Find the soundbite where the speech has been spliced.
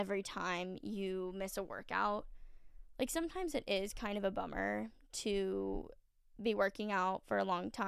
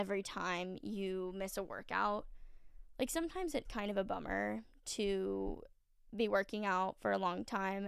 second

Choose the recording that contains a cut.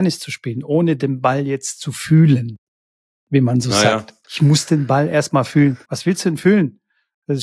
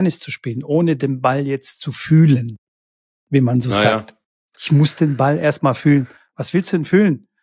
first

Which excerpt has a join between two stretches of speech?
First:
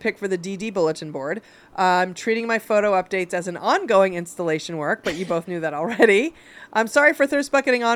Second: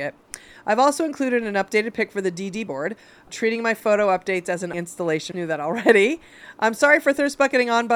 second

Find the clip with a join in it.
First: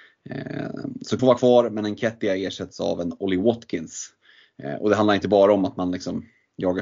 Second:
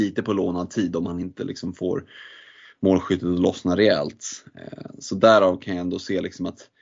first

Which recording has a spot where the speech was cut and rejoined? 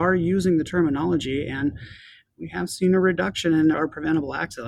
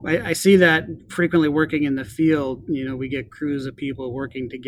first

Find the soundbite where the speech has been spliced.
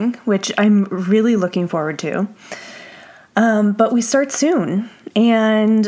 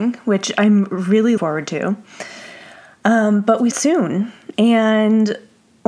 second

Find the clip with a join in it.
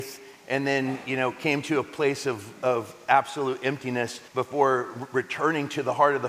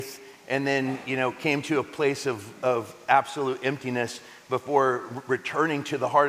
first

